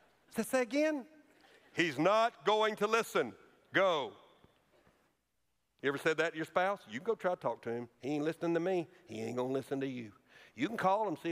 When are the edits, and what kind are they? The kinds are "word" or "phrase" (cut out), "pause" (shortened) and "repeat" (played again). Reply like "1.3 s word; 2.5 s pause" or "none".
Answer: 7.9 s pause